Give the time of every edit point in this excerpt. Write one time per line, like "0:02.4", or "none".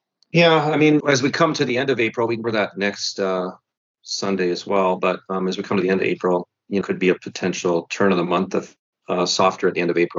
0:01.0
0:02.4
0:06.8
0:08.9

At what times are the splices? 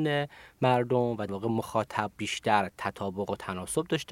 0:01.3
0:02.1

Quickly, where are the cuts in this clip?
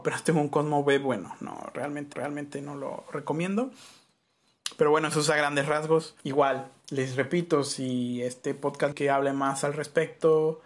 0:02.1
0:06.2
0:08.9

